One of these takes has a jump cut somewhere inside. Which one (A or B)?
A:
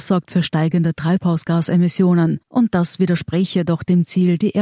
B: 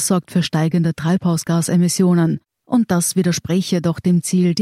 A